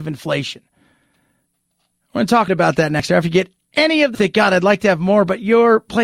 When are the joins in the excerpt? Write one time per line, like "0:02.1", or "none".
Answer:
0:02.5
0:03.6
0:04.1